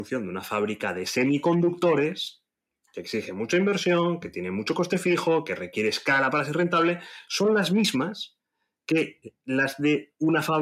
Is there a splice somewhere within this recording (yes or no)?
no